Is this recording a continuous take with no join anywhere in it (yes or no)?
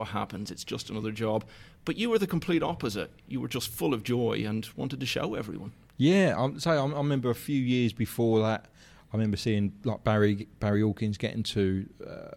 yes